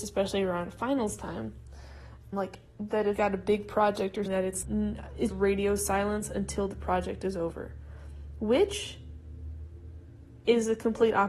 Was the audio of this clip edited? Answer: yes; 5 cuts; at 2.3 s, 3.2 s, 4.3 s, 4.6 s, 5.3 s

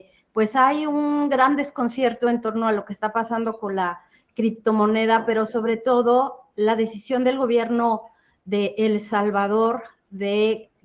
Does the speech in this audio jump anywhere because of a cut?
no; 0 cuts

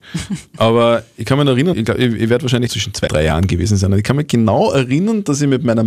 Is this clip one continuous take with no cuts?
no; 3 cuts; at 1.7 s, 2.7 s, 3.1 s

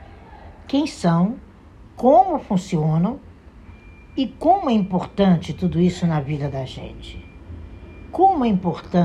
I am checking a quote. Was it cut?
no; 0 cuts

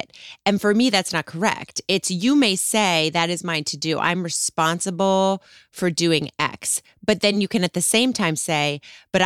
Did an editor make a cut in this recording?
no; 0 cuts

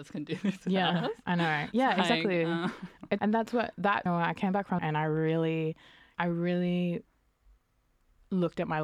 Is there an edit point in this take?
yes; 4 cuts; at 3.2 s, 4.1 s, 4.8 s, 6.1 s

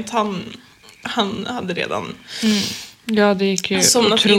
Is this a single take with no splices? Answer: yes; 0 cuts

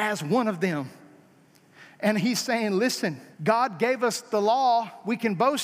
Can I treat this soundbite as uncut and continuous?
no; 1 cut; at 3.3 s

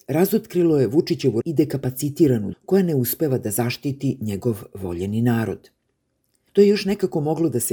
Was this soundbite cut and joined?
yes; 2 cuts; at 1.4 s, 2.5 s

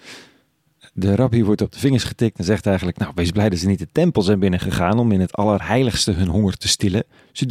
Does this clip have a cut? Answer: no; 0 cuts

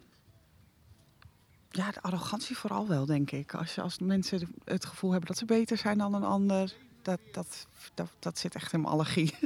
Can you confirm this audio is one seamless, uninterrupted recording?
yes; 0 cuts

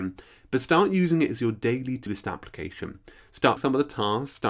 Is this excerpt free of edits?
no; 2 cuts; at 2.1 s, 3.6 s

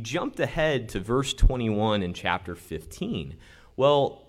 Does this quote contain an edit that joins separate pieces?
no; 0 cuts

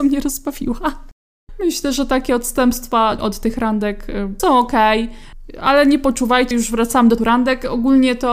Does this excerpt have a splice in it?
yes; 4 cuts; at 3.2 s, 4.4 s, 6.5 s, 7.2 s

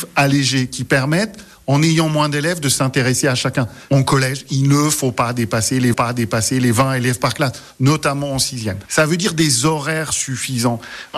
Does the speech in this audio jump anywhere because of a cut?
yes; 1 cut; at 5.9 s

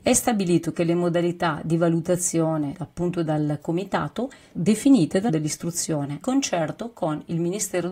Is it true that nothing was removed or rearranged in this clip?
no; 4 cuts; at 2.7 s, 4.5 s, 5.3 s, 6.2 s

